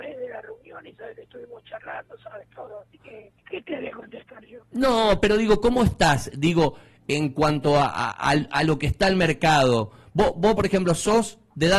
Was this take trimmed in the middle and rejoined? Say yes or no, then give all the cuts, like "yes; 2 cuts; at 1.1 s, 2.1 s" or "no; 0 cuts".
yes; 2 cuts; at 3.4 s, 4.6 s